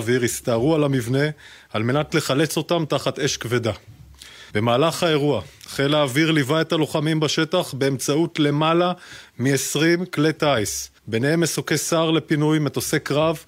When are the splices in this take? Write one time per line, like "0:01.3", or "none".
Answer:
0:04.5
0:11.0